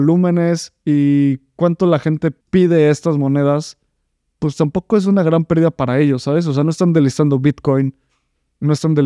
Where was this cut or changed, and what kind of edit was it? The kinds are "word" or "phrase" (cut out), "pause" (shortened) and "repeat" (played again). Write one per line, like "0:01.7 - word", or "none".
0:02.4 - pause

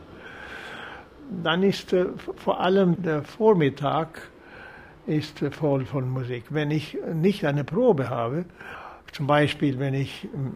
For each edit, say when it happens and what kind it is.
0:03.0 - word
0:09.0 - pause

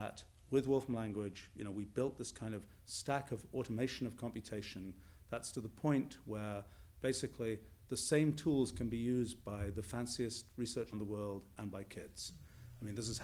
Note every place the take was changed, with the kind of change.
0:10.9 - phrase

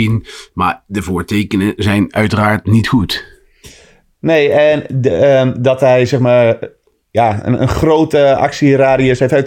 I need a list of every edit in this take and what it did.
none

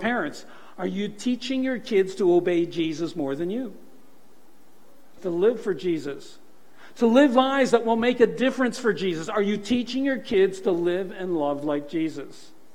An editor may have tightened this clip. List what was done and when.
0:05.2 - phrase

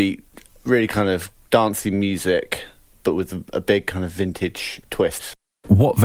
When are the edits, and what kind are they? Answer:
none

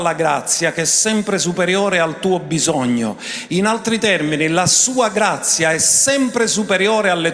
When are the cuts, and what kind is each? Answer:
none

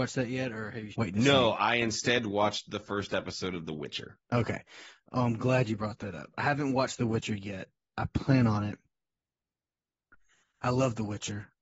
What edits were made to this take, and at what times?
0:00.9 - word
0:04.2 - pause

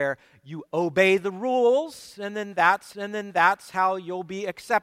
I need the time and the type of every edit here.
0:02.9 - repeat

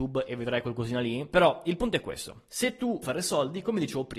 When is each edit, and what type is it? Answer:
0:03.0 - word

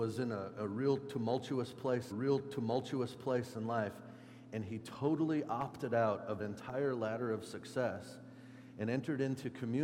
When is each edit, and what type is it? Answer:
0:02.1 - repeat
0:06.4 - word

